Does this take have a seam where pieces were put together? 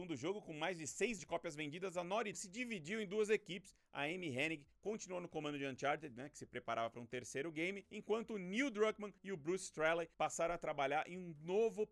yes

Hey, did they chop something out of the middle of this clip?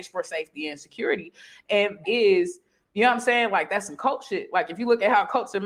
yes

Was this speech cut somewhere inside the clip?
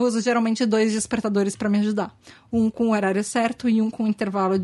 no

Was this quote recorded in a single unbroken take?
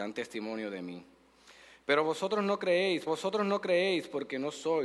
no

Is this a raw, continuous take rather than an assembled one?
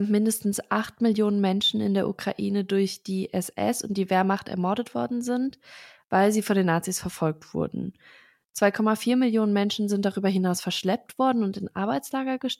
yes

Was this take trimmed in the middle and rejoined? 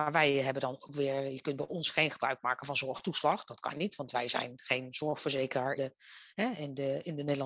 yes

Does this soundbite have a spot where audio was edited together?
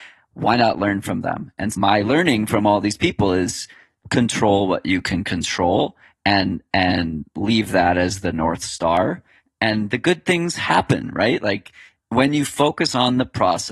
yes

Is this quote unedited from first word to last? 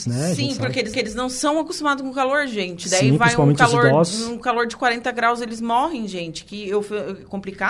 no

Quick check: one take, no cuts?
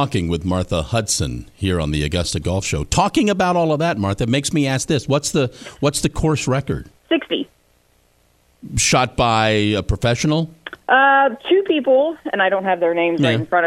no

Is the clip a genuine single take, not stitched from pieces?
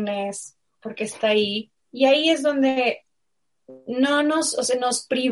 no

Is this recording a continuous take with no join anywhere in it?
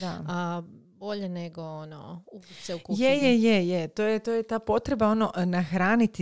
yes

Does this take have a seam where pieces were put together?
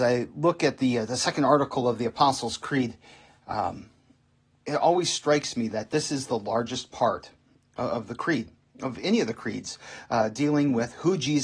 no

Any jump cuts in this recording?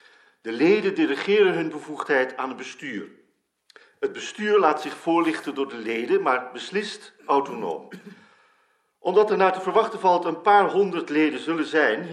no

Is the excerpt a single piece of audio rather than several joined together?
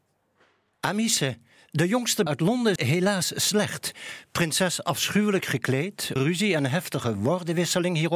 no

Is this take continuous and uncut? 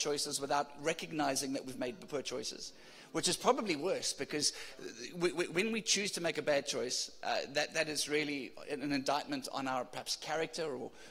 yes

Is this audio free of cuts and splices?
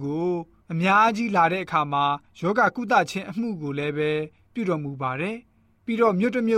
yes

